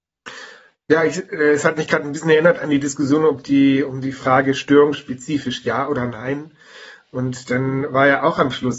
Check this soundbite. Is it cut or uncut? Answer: uncut